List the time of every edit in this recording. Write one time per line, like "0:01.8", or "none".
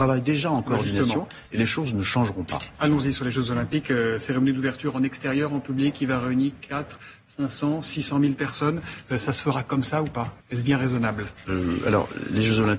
0:10.4